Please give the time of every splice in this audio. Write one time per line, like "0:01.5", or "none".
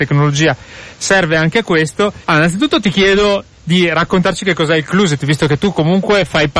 0:02.2